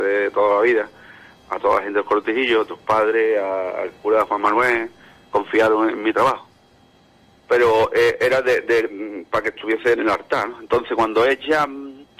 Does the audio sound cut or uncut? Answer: uncut